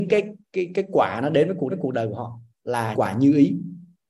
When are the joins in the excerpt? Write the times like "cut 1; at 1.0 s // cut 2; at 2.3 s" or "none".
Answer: cut 1; at 1.7 s // cut 2; at 2.9 s